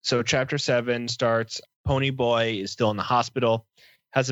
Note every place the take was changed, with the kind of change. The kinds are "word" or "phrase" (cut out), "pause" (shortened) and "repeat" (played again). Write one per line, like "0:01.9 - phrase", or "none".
none